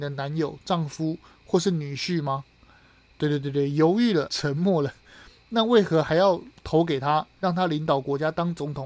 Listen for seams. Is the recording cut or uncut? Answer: cut